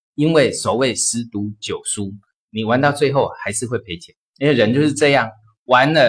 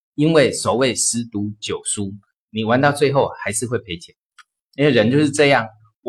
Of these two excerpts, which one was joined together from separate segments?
first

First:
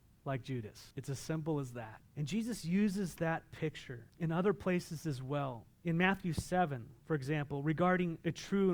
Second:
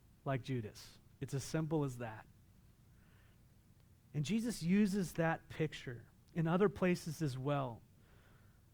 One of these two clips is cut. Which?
first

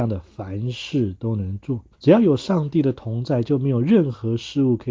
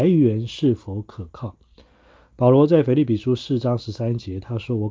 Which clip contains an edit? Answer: first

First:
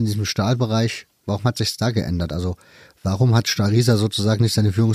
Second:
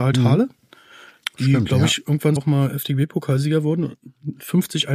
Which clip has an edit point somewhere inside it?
second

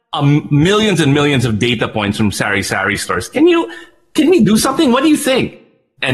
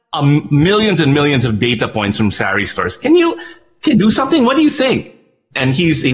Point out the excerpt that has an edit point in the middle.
second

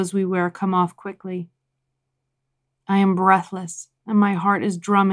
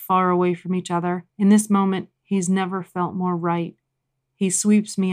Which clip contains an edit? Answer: second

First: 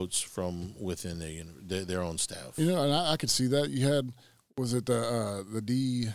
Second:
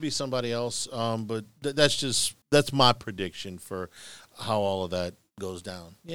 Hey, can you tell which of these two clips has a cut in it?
second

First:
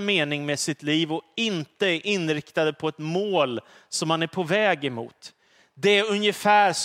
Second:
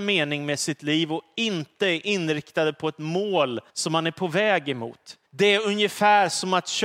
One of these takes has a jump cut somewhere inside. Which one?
second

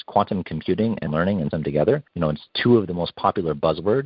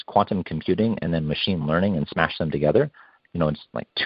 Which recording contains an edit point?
first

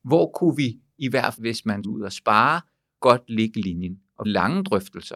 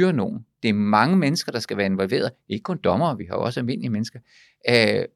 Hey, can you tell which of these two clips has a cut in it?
first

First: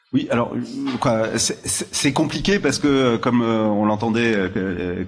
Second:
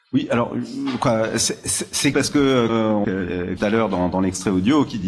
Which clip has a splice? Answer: second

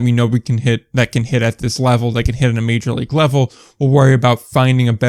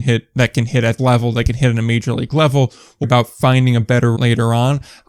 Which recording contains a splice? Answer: second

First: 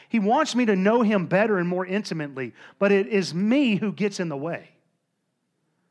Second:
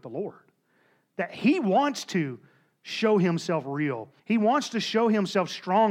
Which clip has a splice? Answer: second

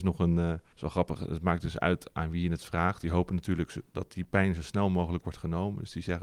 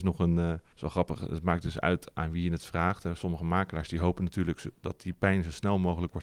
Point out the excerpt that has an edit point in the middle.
first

